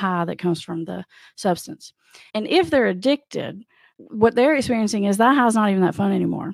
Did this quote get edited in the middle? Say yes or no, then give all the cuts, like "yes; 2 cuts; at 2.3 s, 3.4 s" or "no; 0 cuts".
no; 0 cuts